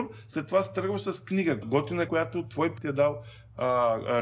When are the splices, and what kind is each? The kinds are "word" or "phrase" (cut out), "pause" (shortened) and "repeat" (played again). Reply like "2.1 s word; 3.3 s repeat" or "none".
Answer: 1.6 s word; 2.1 s word; 2.8 s word